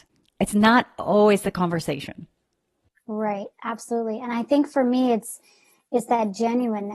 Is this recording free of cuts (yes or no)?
yes